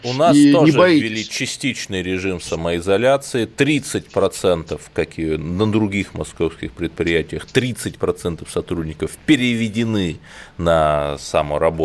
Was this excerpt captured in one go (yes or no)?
yes